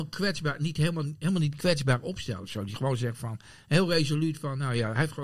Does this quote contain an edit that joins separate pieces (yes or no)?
no